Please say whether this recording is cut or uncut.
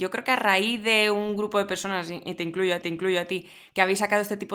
cut